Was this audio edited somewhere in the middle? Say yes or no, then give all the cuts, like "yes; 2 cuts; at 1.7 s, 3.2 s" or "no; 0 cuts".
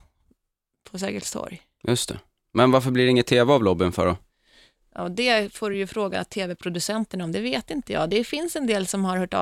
no; 0 cuts